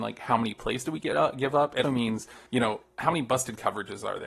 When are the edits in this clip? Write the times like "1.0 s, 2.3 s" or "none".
1.8 s, 2.5 s